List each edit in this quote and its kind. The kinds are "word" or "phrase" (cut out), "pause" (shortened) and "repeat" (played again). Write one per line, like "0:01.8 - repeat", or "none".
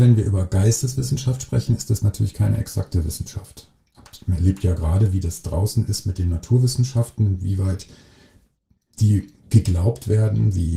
none